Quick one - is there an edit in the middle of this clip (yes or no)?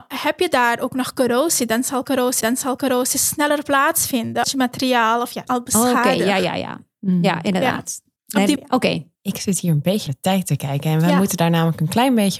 yes